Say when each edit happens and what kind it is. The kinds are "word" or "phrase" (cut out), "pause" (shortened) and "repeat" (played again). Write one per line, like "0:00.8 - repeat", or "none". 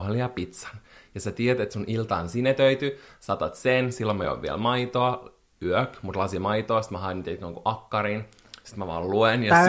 none